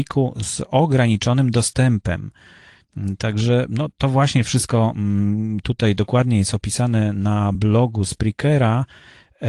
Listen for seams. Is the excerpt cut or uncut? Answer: uncut